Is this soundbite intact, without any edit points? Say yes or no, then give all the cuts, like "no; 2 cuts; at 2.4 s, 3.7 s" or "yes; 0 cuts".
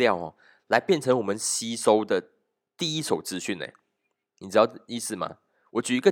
yes; 0 cuts